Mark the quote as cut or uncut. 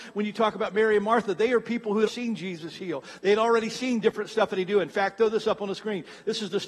cut